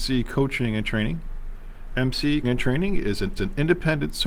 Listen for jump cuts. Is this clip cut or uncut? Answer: cut